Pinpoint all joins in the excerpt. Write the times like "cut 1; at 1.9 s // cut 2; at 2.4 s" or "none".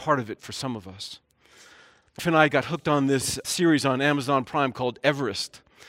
cut 1; at 2.2 s // cut 2; at 3.4 s